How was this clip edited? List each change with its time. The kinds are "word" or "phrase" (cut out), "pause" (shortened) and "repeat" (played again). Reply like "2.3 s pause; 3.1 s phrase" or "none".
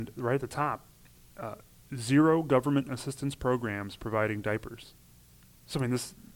none